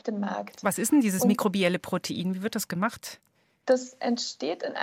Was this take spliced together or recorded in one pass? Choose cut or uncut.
uncut